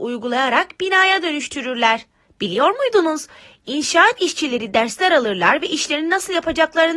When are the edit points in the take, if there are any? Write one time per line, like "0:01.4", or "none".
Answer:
0:02.2

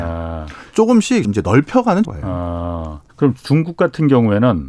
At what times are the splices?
0:01.2
0:02.0
0:03.1

